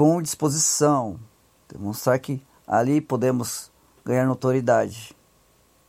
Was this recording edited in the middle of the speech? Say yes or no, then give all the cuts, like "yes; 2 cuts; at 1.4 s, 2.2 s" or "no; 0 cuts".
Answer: no; 0 cuts